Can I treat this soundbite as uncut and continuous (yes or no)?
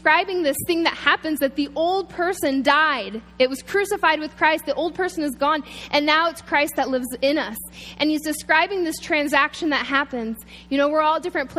yes